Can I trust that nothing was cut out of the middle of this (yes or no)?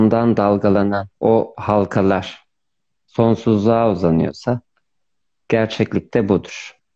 no